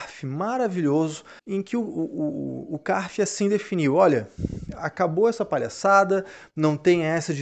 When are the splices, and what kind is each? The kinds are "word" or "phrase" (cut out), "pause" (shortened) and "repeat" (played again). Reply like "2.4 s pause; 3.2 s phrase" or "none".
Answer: 1.4 s pause